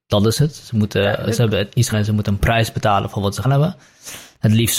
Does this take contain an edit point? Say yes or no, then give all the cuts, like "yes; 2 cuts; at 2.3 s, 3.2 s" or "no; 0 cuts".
yes; 2 cuts; at 1.9 s, 3.4 s